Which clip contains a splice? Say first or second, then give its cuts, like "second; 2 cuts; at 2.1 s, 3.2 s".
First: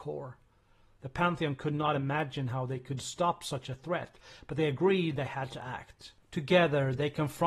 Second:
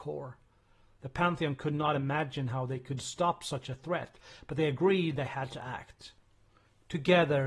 first; 1 cut; at 6.2 s